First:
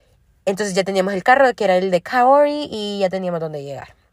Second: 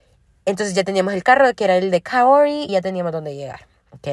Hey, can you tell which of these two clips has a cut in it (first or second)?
second